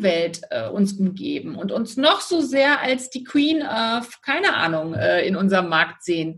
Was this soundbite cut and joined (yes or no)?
no